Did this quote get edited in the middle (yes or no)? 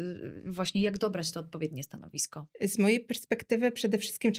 no